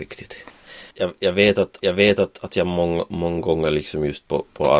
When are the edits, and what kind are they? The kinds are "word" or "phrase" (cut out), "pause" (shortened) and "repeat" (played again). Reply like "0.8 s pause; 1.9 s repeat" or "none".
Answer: 0.9 s pause; 1.8 s repeat